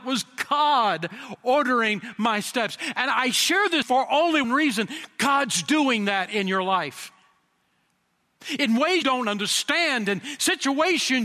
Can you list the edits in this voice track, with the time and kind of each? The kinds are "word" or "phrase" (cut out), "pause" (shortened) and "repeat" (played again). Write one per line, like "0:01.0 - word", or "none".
0:03.8 - phrase
0:04.4 - word
0:09.0 - word

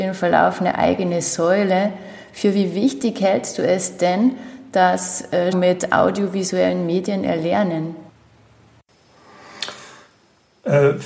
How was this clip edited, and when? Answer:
0:05.5 - phrase

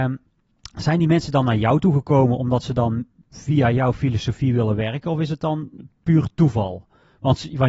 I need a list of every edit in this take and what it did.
0:05.9 - pause

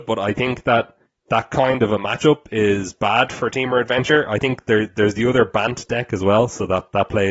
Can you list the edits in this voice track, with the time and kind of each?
none

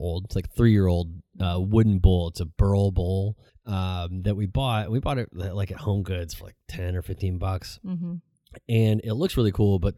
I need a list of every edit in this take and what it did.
0:03.5 - pause

